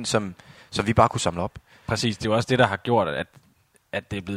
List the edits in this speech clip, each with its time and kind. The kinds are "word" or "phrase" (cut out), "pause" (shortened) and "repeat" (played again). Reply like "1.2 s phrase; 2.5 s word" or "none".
none